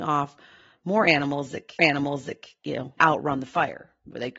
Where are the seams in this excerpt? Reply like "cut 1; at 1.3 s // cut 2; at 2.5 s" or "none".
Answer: cut 1; at 1.8 s // cut 2; at 3.0 s